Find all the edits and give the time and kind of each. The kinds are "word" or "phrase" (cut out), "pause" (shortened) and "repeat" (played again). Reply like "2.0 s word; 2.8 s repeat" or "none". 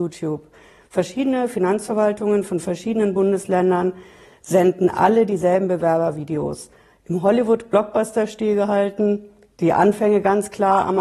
none